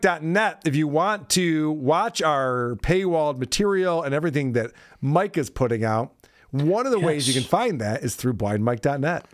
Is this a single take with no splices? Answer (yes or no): yes